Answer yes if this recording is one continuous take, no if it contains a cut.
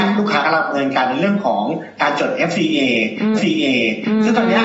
no